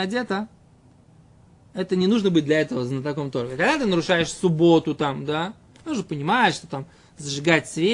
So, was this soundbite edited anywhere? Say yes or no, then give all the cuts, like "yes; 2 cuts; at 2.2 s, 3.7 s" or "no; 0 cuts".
no; 0 cuts